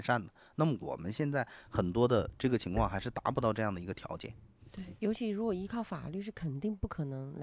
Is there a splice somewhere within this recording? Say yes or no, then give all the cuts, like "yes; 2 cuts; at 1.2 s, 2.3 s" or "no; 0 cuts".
no; 0 cuts